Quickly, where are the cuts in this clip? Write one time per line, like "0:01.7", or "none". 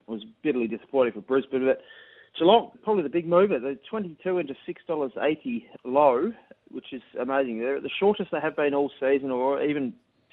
0:02.7
0:05.8